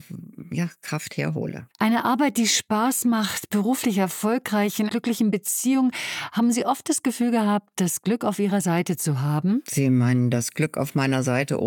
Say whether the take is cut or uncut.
cut